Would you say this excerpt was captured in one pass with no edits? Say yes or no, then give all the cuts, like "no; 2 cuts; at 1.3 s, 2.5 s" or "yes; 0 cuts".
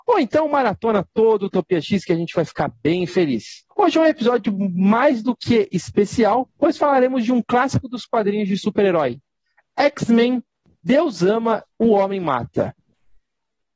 yes; 0 cuts